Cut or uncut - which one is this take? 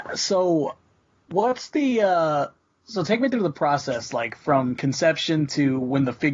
uncut